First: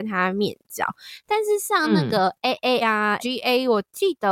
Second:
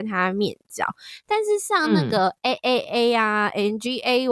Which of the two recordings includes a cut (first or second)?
first